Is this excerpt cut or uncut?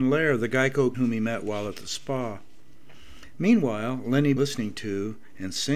cut